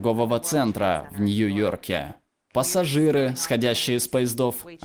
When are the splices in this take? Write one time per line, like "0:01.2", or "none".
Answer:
none